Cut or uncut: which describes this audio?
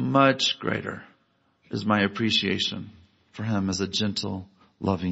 uncut